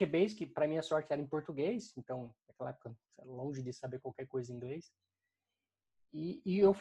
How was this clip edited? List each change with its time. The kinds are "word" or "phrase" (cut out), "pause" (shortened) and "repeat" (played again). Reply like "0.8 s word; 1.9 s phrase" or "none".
none